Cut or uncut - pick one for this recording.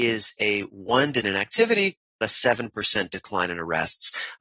cut